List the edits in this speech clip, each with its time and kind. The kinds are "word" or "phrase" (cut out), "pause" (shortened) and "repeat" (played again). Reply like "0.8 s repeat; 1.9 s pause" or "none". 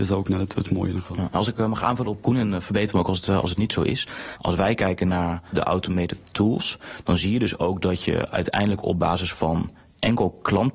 2.2 s word